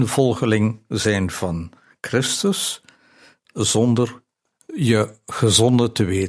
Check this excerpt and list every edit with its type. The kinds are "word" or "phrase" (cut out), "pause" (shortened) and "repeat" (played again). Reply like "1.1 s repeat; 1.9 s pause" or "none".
none